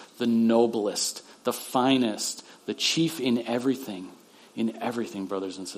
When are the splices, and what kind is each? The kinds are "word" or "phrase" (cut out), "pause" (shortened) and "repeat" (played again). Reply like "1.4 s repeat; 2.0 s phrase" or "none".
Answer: none